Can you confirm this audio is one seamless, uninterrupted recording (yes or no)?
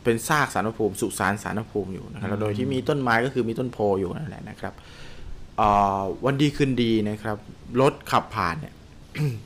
yes